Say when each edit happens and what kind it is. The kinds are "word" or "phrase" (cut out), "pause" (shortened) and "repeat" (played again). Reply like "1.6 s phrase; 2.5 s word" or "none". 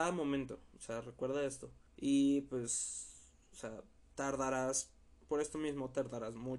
1.9 s pause; 4.0 s pause